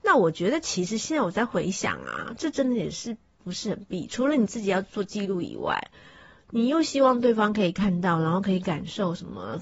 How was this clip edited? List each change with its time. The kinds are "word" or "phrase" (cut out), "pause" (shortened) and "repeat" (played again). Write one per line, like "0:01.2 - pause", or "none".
none